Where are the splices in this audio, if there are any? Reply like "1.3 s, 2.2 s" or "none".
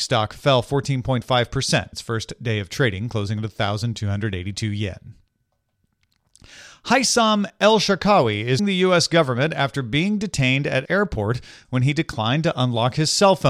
1.9 s, 8.6 s, 10.8 s